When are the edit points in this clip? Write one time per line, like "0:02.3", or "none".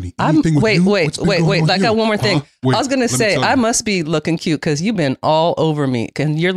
none